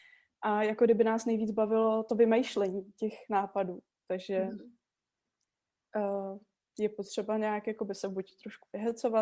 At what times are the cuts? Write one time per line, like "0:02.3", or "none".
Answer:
none